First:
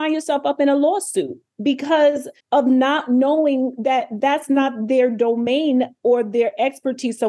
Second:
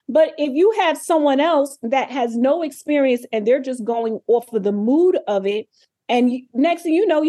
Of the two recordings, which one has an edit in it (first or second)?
first